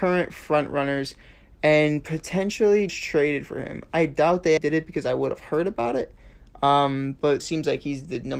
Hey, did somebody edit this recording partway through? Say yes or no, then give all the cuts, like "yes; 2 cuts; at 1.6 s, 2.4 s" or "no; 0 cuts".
yes; 3 cuts; at 2.9 s, 4.6 s, 7.4 s